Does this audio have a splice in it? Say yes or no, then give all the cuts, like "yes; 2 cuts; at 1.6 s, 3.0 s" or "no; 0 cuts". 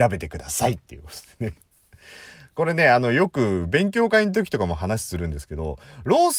no; 0 cuts